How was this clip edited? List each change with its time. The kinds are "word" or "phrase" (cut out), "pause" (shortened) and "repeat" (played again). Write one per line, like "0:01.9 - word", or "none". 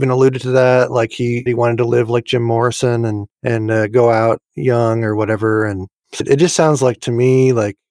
0:01.5 - phrase
0:06.2 - word